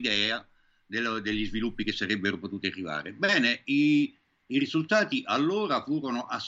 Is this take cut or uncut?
uncut